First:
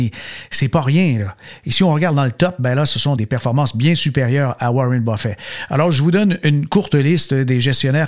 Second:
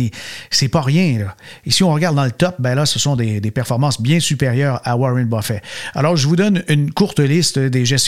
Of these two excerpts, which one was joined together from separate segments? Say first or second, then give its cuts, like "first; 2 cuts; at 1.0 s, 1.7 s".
first; 1 cut; at 3.2 s